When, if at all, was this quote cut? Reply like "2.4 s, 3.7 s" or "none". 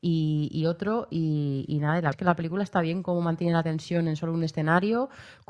2.1 s